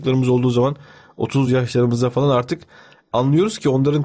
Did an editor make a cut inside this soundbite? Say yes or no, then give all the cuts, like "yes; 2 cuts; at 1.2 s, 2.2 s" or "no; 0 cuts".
no; 0 cuts